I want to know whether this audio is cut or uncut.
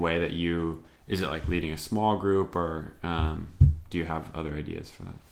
cut